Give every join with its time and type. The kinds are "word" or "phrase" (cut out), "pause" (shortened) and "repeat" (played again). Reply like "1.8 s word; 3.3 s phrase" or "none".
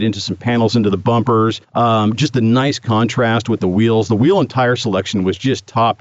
1.6 s pause